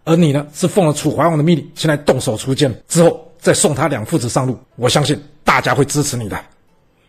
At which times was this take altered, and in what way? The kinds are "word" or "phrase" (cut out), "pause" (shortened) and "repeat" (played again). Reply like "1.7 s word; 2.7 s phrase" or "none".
2.8 s pause; 4.6 s pause